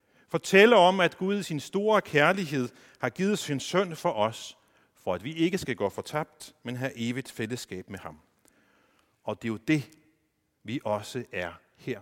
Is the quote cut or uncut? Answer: uncut